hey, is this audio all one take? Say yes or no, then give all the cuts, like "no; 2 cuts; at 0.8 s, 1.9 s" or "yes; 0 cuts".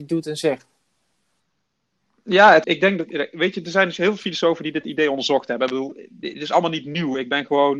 no; 1 cut; at 2.6 s